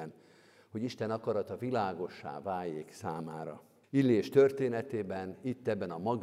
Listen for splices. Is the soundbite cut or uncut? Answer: cut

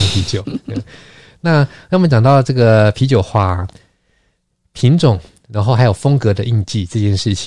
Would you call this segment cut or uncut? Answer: uncut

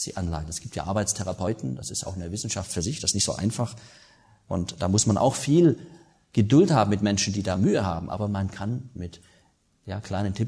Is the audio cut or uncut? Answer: uncut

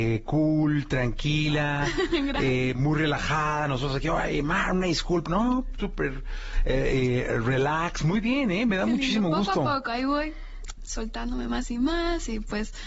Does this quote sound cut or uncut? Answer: uncut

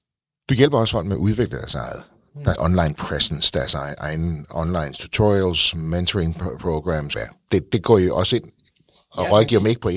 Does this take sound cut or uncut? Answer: cut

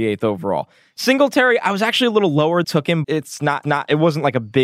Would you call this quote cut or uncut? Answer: cut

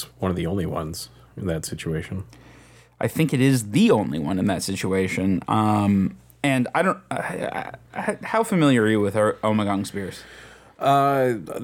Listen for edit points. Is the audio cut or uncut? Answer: uncut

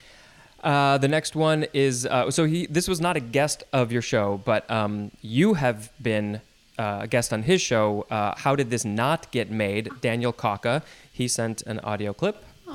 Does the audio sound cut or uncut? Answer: uncut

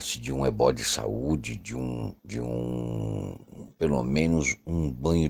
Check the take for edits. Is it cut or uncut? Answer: cut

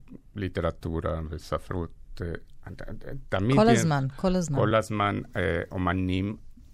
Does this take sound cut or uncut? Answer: uncut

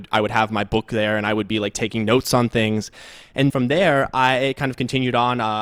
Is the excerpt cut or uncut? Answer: cut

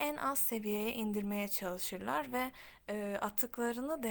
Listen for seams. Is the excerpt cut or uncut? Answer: uncut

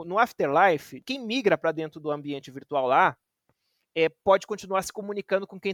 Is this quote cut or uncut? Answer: uncut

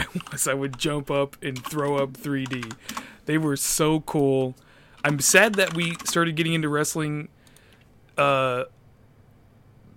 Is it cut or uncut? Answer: uncut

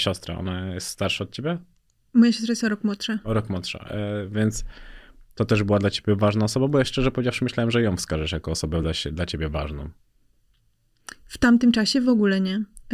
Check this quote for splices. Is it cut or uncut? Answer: uncut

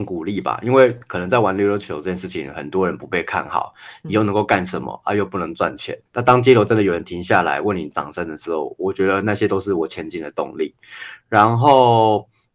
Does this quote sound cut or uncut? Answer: cut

